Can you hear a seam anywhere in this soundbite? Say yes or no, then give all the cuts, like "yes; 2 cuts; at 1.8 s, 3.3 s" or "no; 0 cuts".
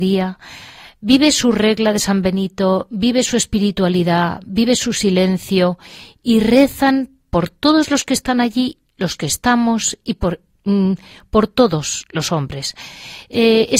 no; 0 cuts